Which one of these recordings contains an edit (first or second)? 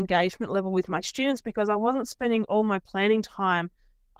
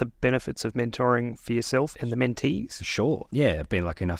second